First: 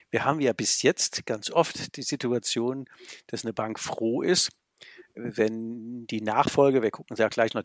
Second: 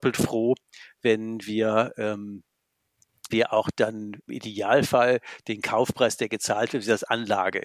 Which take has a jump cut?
second; 2 cuts; at 3.3 s, 4.3 s

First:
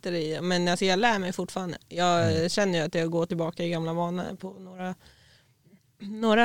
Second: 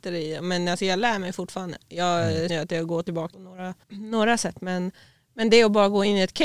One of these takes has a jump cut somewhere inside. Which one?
second; 3 cuts; at 2.5 s, 3.3 s, 3.8 s

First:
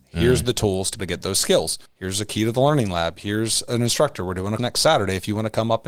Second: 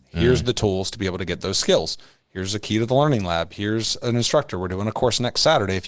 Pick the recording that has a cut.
first; 3 cuts; at 1.0 s, 1.9 s, 4.6 s

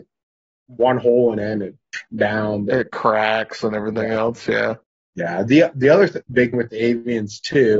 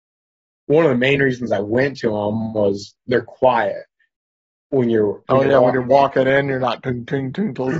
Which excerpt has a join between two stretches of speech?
first; 3 cuts; at 2.1 s, 4.8 s, 6.5 s

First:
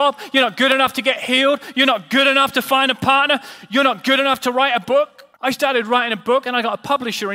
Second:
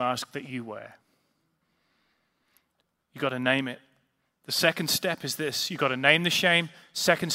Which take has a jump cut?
first; 1 cut; at 5.3 s

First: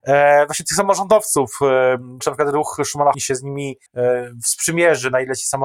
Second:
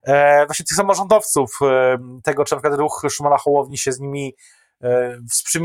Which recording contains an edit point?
first; 3 cuts; at 2.2 s, 3.1 s, 3.9 s

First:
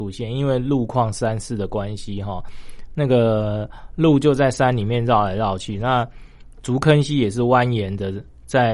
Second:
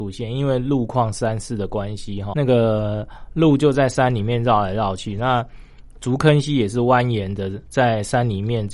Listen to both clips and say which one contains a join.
second; 2 cuts; at 2.3 s, 7.7 s

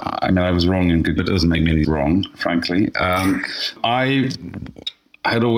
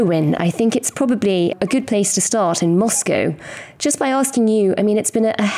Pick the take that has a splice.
first; 2 cuts; at 1.2 s, 1.8 s

